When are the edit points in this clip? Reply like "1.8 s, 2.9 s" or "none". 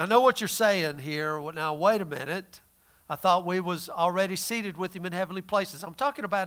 none